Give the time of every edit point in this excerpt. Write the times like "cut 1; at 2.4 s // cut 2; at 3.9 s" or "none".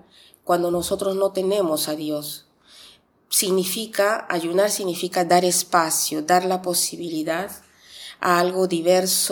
none